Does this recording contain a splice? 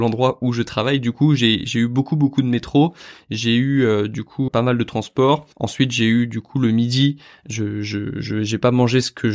yes; 2 cuts; at 4.5 s, 5.5 s

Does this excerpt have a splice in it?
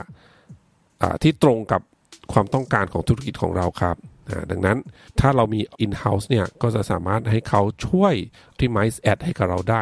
yes; 3 cuts; at 5.1 s, 5.7 s, 8.6 s

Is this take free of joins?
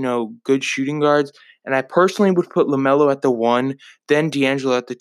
yes; 0 cuts

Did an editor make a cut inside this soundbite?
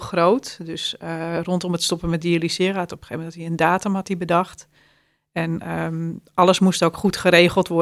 no; 0 cuts

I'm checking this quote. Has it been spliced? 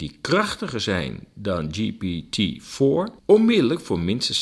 yes; 1 cut; at 3.2 s

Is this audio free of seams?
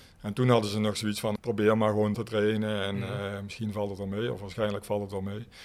no; 2 cuts; at 1.4 s, 2.1 s

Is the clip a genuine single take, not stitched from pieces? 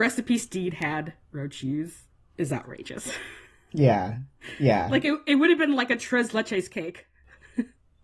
yes; 0 cuts

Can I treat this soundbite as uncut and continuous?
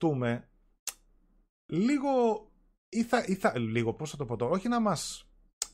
yes; 0 cuts

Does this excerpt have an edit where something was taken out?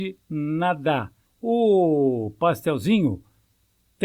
yes; 1 cut; at 1.3 s

